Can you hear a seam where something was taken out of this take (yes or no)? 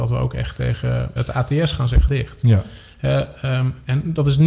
yes